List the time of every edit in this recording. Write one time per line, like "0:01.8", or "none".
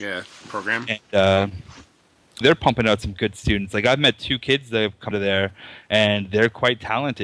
0:02.4
0:05.1

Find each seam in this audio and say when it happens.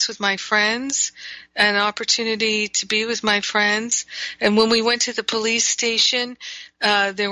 none

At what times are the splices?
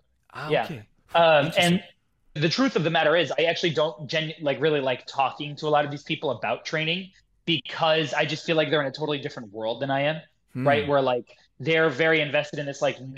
0:02.4

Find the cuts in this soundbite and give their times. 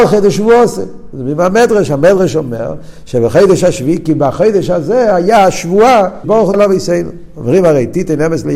0:06.2
0:06.5

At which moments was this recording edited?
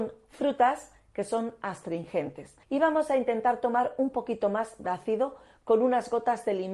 0:02.6
0:04.8

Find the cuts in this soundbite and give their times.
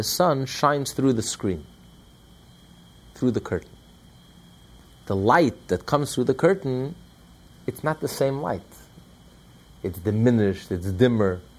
none

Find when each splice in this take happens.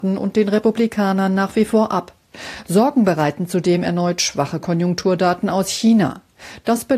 none

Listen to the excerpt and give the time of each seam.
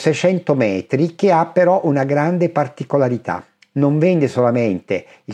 none

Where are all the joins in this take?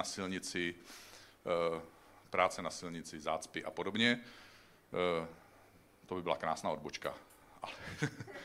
none

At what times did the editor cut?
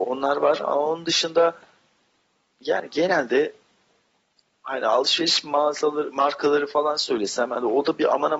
none

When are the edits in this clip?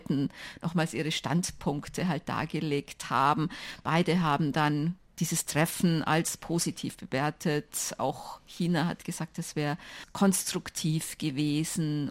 none

